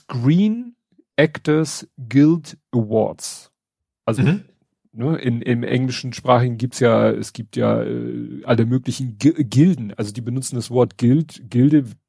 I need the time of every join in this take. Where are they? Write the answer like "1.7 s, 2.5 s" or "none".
none